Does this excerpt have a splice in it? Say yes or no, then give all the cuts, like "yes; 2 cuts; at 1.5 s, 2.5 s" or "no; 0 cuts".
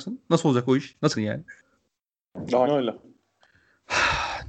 yes; 2 cuts; at 1.1 s, 2.6 s